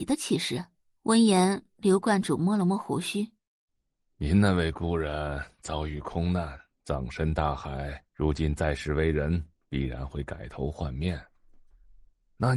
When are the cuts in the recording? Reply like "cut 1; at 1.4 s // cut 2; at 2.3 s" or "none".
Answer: cut 1; at 0.9 s // cut 2; at 3.4 s // cut 3; at 8.1 s

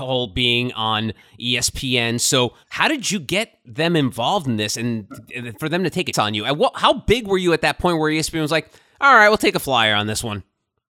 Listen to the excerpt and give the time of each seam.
cut 1; at 2.6 s // cut 2; at 6.1 s

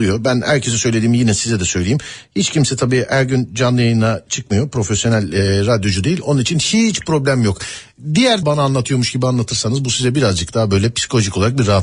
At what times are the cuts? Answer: cut 1; at 8.4 s

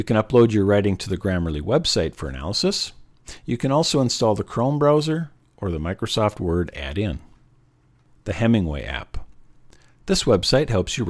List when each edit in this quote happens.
none

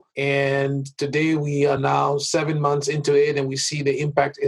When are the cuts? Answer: none

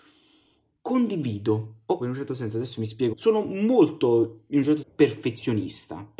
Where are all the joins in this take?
cut 1; at 2.0 s // cut 2; at 3.1 s // cut 3; at 4.8 s

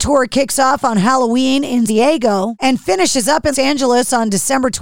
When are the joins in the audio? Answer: cut 1; at 1.9 s // cut 2; at 3.5 s

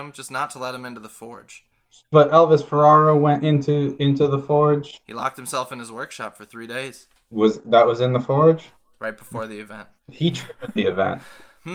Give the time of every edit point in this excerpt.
none

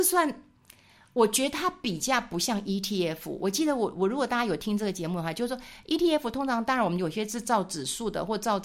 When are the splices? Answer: none

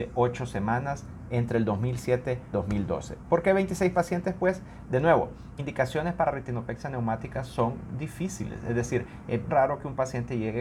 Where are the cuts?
cut 1; at 2.5 s // cut 2; at 5.6 s // cut 3; at 9.5 s

